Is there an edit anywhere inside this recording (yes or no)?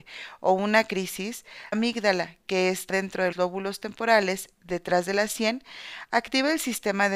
yes